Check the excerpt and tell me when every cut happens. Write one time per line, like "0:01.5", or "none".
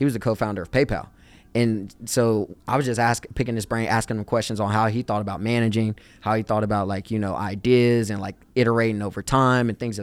none